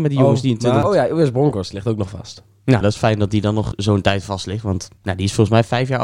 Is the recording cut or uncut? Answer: cut